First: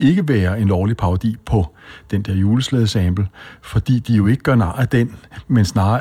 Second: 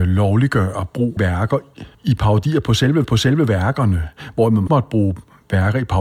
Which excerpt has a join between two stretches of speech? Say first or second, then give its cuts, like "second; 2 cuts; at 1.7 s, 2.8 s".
second; 4 cuts; at 1.2 s, 1.9 s, 3.0 s, 4.7 s